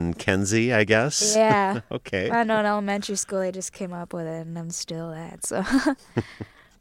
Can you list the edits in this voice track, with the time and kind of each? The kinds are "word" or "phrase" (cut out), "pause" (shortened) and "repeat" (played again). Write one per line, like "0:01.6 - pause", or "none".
none